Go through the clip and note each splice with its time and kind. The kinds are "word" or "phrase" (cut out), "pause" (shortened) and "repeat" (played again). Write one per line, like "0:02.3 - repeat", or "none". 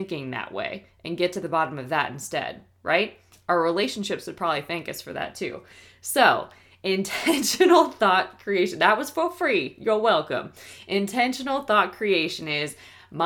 none